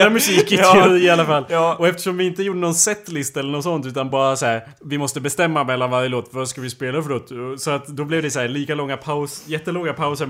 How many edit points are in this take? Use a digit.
0